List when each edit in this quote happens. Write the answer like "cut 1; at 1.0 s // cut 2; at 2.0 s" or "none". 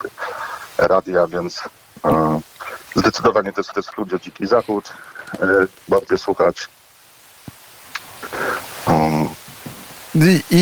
cut 1; at 3.7 s // cut 2; at 6.1 s